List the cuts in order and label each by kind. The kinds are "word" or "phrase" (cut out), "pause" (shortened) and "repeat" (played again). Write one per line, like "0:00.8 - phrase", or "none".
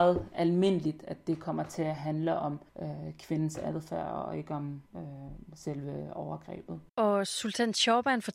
0:02.7 - pause
0:04.9 - pause
0:06.9 - pause